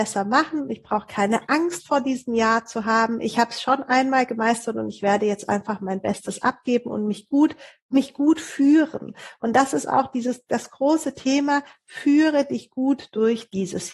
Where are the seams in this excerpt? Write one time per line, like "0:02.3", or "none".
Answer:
none